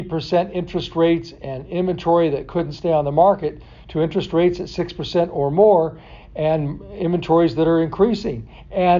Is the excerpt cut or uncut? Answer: uncut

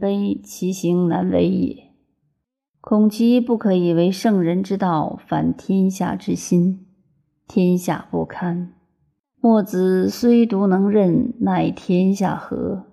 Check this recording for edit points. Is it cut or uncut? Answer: uncut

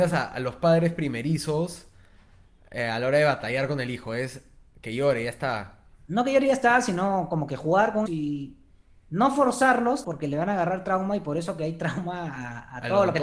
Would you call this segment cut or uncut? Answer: cut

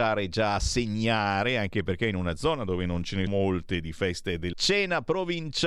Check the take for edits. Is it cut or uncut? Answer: cut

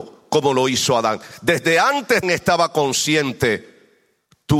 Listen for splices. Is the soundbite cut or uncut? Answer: cut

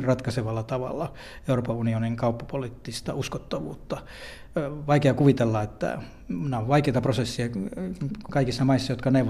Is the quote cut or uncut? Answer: uncut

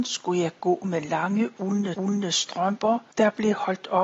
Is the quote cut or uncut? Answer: cut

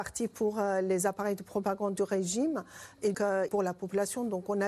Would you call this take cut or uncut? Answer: cut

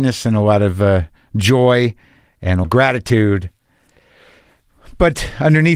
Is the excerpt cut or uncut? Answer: cut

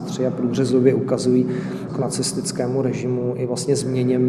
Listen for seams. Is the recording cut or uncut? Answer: cut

